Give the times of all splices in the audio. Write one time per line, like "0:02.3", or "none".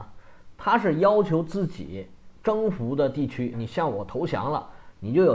0:03.5